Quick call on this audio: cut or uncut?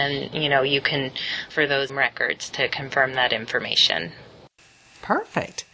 cut